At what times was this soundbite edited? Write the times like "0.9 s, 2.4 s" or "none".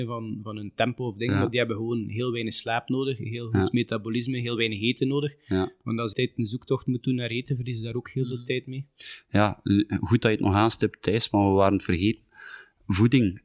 6.1 s